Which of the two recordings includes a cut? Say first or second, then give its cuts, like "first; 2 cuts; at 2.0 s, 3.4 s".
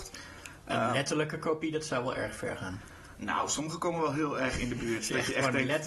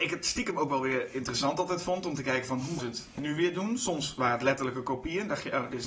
second; 1 cut; at 2.8 s